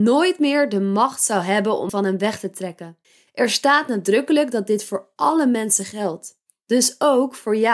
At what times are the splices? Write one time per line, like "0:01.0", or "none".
0:01.9
0:03.0